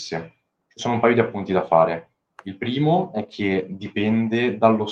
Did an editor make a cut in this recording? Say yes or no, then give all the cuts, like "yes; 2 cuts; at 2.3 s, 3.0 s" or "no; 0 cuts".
no; 0 cuts